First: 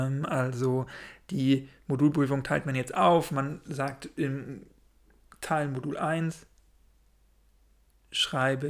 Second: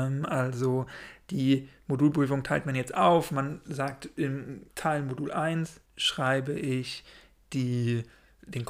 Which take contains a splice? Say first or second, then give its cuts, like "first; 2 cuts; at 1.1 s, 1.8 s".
second; 2 cuts; at 4.7 s, 5.8 s